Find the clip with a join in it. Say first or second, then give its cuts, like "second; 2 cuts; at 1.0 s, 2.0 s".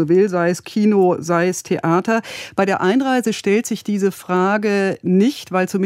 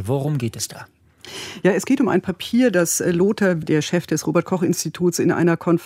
second; 1 cut; at 3.6 s